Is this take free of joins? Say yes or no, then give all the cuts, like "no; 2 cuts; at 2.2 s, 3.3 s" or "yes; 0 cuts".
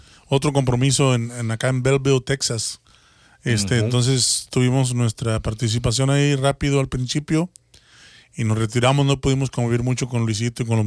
yes; 0 cuts